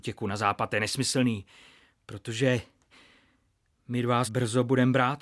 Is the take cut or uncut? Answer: cut